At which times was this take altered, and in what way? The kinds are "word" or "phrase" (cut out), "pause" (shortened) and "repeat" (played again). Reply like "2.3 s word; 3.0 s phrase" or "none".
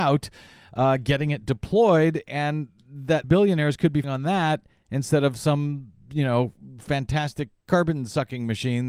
3.2 s word; 4.0 s word